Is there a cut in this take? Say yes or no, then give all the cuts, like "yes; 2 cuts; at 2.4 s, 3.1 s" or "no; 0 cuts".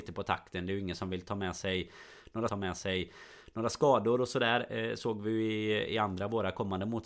yes; 1 cut; at 2.5 s